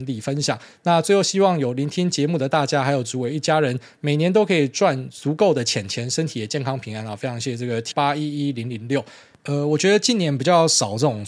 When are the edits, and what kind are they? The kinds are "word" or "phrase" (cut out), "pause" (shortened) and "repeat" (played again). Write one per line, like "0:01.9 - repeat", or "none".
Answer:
0:07.9 - word